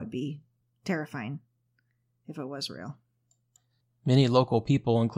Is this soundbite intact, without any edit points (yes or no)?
yes